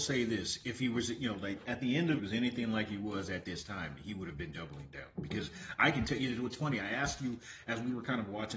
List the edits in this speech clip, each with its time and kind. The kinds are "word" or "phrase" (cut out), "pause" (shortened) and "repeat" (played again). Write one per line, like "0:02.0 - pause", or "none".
0:02.2 - phrase